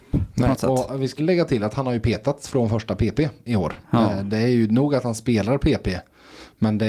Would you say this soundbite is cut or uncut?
cut